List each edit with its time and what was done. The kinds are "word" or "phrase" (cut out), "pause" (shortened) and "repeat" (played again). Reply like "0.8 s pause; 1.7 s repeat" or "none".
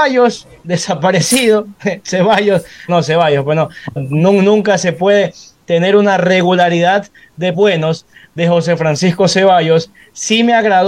2.9 s word; 4.0 s word; 7.5 s word